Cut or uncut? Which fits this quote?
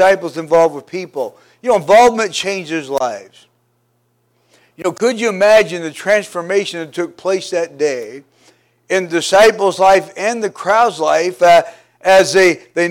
uncut